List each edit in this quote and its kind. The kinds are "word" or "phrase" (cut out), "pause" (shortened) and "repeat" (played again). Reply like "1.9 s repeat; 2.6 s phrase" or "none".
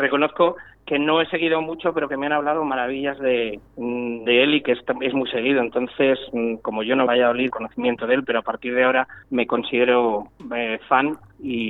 3.7 s pause; 7.1 s phrase; 7.5 s phrase; 9.2 s pause